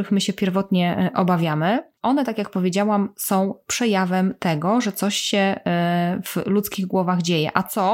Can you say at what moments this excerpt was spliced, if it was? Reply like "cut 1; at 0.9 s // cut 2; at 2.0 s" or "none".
cut 1; at 2.0 s